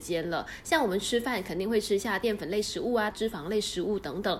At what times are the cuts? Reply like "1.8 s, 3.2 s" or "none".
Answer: 3.1 s